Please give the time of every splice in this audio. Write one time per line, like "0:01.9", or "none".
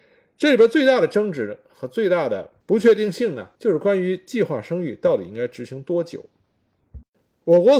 0:02.6
0:03.5